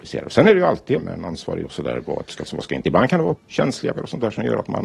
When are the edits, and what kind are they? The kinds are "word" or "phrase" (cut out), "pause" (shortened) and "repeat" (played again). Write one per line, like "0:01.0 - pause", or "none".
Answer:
0:01.0 - word
0:01.6 - word
0:02.5 - word
0:03.4 - word
0:03.9 - word